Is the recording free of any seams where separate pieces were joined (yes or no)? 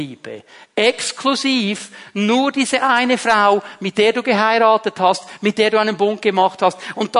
yes